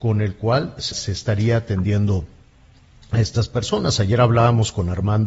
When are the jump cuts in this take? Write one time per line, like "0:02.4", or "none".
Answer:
0:00.9